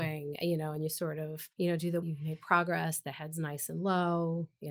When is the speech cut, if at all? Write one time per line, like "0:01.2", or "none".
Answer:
0:01.5
0:02.0